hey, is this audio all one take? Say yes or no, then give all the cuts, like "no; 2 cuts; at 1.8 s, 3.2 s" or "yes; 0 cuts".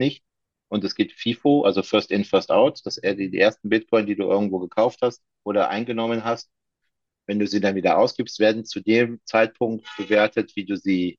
yes; 0 cuts